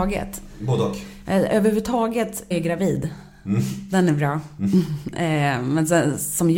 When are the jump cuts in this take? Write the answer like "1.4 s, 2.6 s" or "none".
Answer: 2.5 s